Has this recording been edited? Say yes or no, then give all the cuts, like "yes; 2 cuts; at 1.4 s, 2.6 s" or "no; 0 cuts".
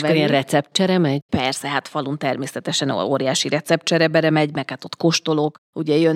no; 0 cuts